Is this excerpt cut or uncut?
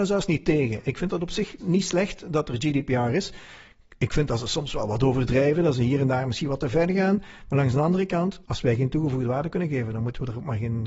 cut